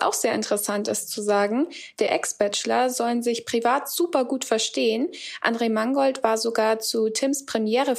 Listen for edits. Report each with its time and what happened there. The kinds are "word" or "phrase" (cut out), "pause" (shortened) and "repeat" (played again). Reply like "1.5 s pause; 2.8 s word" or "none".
2.1 s phrase